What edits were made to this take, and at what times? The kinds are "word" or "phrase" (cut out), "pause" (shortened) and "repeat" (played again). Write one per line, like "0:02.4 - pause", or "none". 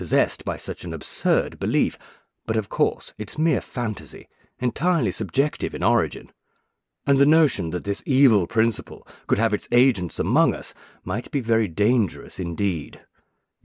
none